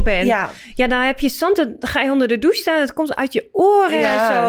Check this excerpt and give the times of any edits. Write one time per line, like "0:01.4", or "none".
none